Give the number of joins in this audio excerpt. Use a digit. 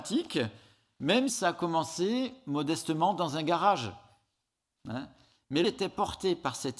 2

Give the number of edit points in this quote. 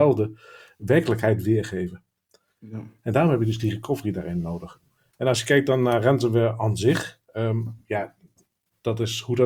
0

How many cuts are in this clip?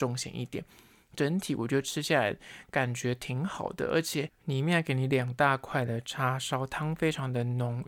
1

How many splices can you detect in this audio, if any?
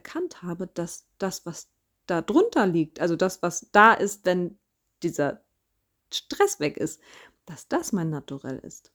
0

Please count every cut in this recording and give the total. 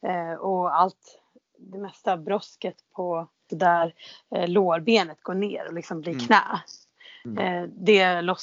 1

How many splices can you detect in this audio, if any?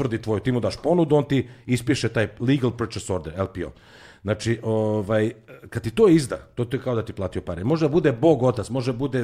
0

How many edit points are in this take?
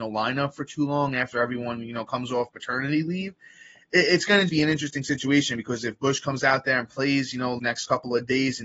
2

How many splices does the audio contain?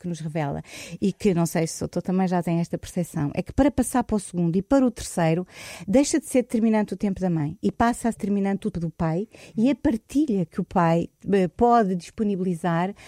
2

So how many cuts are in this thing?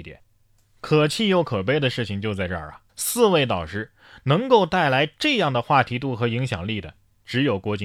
1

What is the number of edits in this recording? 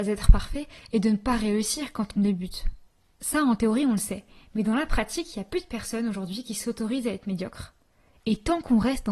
0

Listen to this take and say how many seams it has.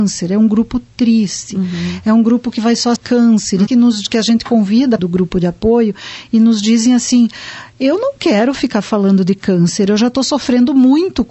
3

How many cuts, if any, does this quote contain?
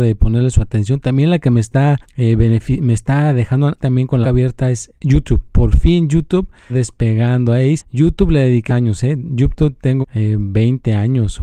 8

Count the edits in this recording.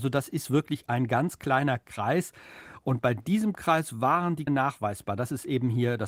1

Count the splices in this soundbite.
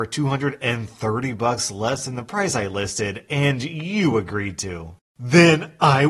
0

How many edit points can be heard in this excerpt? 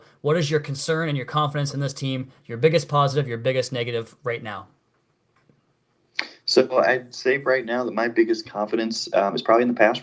0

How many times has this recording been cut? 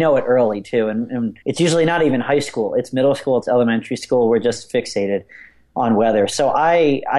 1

